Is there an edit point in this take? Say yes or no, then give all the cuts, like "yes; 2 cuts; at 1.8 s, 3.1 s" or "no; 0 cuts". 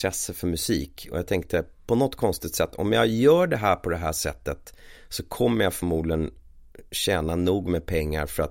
no; 0 cuts